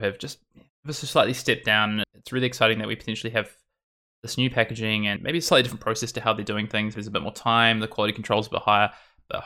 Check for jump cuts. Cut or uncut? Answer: cut